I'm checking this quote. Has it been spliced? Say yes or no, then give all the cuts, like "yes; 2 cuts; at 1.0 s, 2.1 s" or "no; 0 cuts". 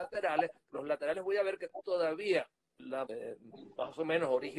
yes; 2 cuts; at 1.8 s, 3.1 s